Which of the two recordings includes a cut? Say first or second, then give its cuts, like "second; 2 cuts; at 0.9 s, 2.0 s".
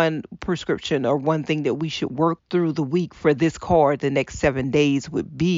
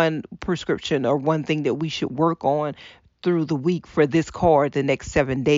first; 1 cut; at 2.4 s